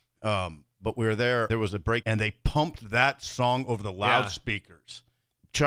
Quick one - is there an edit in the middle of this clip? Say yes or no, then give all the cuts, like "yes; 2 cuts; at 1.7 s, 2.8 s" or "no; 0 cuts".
yes; 2 cuts; at 1.5 s, 2.0 s